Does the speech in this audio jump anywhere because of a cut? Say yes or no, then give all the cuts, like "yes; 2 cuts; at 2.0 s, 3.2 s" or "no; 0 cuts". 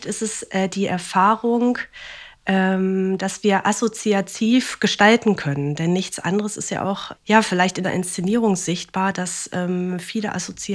yes; 2 cuts; at 7.1 s, 7.8 s